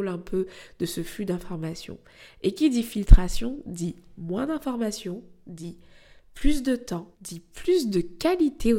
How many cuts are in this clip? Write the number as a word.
one